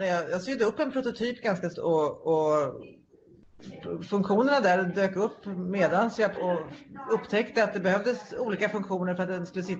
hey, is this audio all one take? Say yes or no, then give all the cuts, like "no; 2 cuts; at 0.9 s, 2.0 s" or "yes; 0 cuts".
no; 2 cuts; at 1.7 s, 6.3 s